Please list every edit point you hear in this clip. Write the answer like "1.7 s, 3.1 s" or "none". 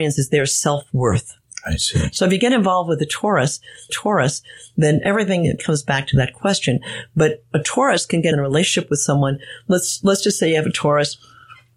3.9 s, 5.6 s, 8.3 s